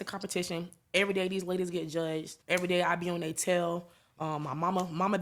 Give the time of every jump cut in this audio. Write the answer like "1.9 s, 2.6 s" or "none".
2.4 s

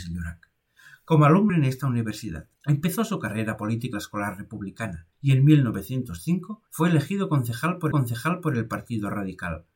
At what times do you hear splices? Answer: 1.5 s, 2.6 s, 3.9 s, 5.1 s, 6.7 s, 7.9 s

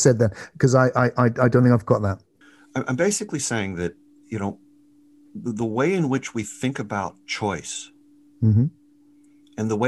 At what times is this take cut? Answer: 2.4 s

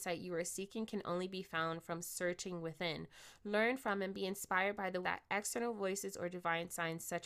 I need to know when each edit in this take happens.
5.0 s

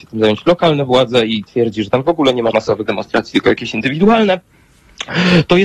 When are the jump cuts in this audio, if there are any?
2.5 s, 2.9 s

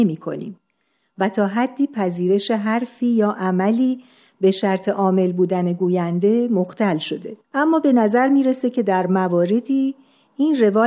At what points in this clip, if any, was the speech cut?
7.4 s

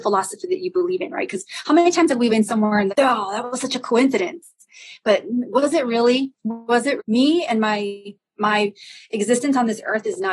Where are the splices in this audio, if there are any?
2.3 s, 2.9 s, 7.0 s

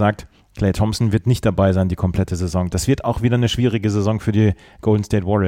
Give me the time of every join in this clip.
none

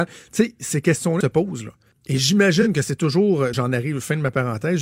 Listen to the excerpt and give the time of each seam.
1.2 s, 1.9 s, 3.5 s

